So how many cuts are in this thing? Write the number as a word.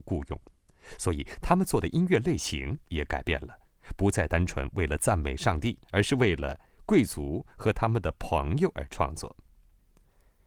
one